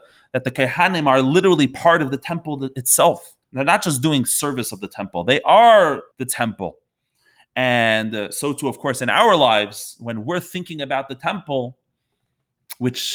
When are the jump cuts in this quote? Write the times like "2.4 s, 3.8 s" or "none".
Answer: 3.4 s, 6.1 s